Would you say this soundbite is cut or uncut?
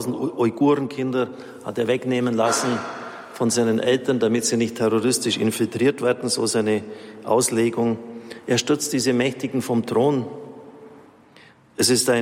uncut